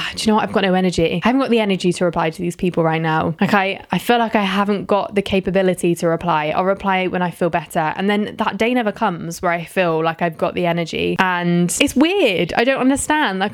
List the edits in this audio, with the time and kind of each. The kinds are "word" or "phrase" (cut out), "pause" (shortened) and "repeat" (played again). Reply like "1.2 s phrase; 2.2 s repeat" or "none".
none